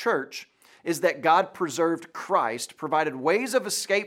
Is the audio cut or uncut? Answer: uncut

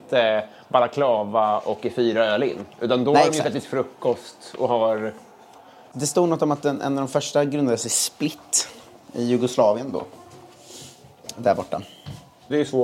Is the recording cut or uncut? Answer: uncut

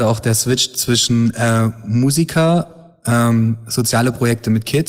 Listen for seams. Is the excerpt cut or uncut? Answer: uncut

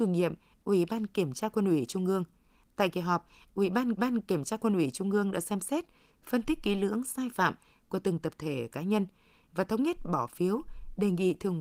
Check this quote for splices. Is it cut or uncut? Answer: cut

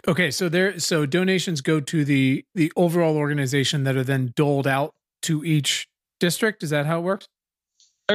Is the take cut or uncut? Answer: uncut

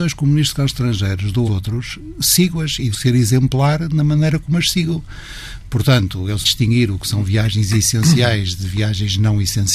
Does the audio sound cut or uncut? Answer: cut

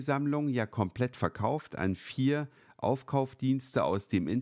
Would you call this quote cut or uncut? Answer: uncut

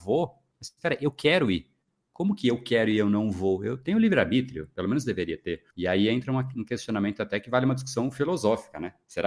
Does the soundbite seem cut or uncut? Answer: cut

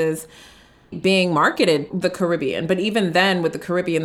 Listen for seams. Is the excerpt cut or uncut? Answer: cut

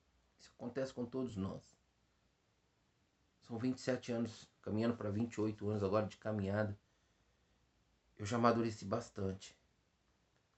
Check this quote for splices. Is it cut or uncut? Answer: uncut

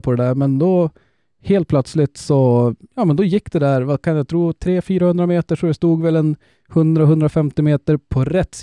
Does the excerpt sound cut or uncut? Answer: uncut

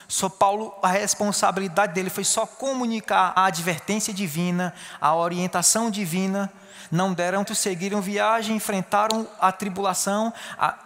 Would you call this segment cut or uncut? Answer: cut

